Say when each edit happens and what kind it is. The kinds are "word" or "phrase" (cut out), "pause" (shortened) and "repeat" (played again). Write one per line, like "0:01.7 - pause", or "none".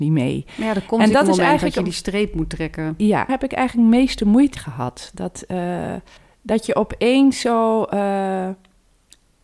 0:03.3 - phrase
0:04.6 - word
0:06.2 - pause